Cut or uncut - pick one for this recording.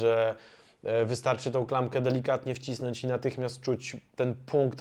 uncut